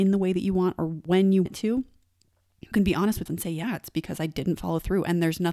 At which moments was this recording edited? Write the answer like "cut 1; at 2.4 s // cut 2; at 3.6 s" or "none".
cut 1; at 1.1 s // cut 2; at 1.5 s // cut 3; at 2.7 s // cut 4; at 3.3 s